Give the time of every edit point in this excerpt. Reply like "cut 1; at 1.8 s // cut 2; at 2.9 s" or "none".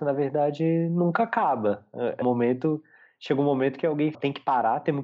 cut 1; at 2.2 s // cut 2; at 4.1 s